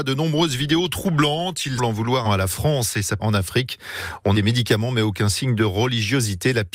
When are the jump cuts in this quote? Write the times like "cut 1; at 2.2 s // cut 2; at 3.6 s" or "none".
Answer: cut 1; at 1.8 s // cut 2; at 2.2 s // cut 3; at 3.2 s // cut 4; at 4.3 s